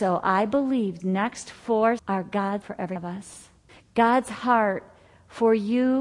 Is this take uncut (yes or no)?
no